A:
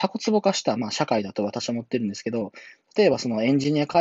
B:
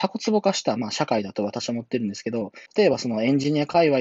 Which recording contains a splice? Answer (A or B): B